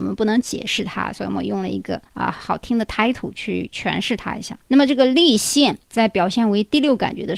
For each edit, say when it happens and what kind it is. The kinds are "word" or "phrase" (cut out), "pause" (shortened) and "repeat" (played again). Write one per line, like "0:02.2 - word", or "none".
0:02.1 - pause
0:04.6 - pause
0:05.8 - pause